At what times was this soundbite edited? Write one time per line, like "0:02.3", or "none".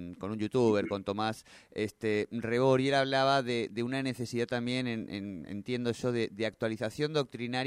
none